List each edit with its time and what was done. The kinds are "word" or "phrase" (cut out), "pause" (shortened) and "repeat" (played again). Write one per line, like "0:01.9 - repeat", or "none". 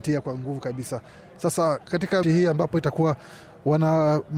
0:02.2 - word